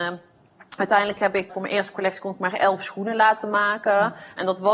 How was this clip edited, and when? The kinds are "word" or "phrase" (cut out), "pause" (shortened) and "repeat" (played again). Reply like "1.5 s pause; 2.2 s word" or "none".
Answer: 1.5 s word